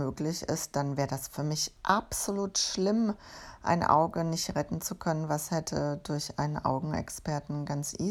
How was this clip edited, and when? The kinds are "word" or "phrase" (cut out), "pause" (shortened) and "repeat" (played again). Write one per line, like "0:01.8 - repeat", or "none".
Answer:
none